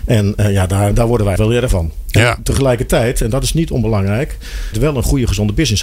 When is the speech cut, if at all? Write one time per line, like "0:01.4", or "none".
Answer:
0:00.9
0:01.4
0:01.7
0:04.7